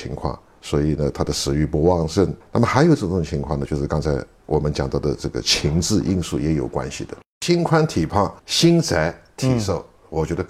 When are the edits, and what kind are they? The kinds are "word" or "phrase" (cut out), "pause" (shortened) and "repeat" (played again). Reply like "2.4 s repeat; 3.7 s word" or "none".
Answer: 2.4 s pause; 8.4 s pause